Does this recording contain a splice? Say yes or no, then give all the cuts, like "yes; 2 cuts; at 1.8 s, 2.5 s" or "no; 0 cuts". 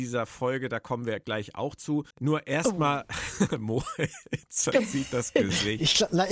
yes; 1 cut; at 2.1 s